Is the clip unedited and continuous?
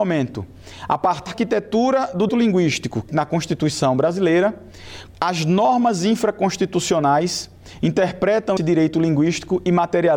no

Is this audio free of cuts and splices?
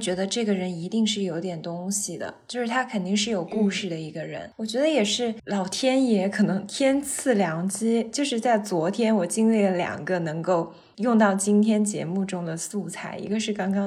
yes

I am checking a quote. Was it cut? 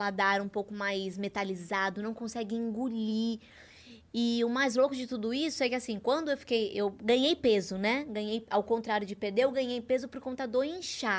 no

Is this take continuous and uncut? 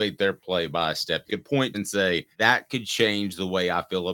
no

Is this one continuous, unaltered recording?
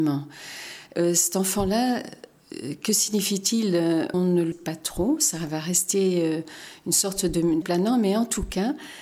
no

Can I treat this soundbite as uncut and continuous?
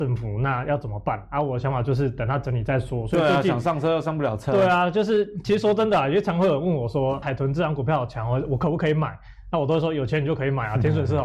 no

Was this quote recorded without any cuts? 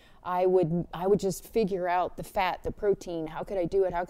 yes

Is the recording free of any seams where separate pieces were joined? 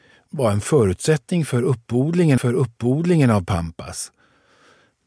no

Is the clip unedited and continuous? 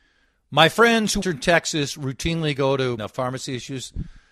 no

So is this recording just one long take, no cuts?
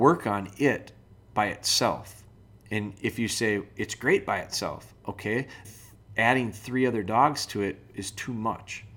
no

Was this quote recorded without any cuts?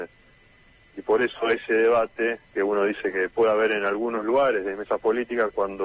no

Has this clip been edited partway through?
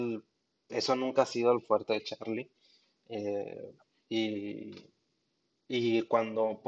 no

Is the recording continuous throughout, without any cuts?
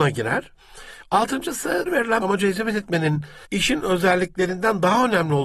no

